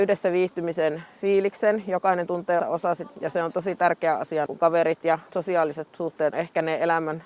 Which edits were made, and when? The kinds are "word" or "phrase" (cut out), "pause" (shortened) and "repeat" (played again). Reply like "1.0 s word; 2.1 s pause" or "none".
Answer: 2.6 s word; 3.1 s word; 4.5 s word; 5.3 s word; 6.3 s word